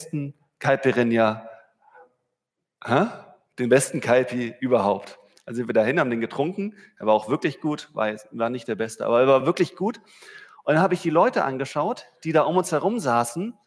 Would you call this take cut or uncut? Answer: uncut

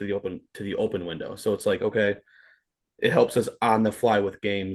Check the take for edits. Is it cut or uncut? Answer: uncut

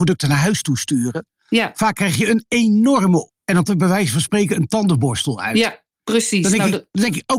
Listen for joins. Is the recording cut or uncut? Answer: cut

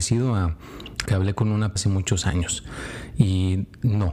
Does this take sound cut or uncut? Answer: cut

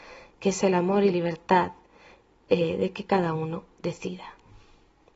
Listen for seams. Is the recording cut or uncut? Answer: cut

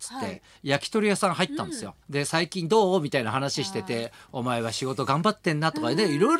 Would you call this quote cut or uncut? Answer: cut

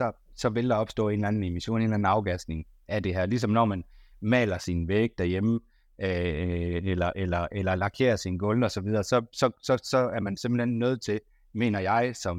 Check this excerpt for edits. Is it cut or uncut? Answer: uncut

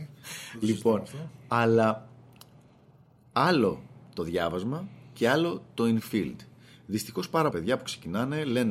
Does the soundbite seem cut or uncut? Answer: cut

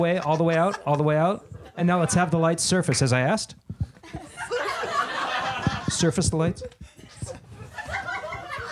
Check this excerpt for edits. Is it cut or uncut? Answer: uncut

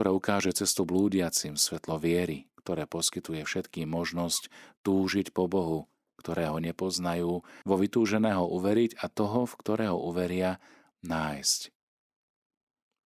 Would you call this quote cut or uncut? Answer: cut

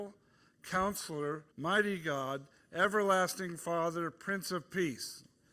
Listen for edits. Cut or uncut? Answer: cut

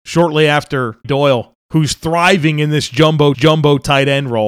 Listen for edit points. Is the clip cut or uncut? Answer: cut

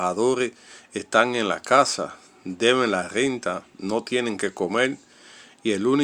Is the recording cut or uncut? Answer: uncut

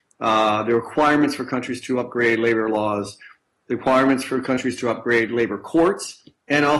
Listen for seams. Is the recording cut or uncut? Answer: uncut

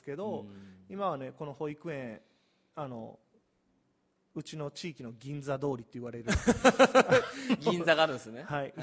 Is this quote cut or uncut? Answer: uncut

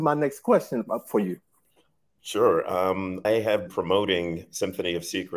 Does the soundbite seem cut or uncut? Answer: cut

